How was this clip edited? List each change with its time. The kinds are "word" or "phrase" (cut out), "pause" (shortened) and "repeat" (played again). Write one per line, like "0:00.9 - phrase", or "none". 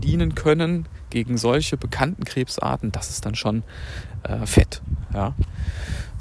none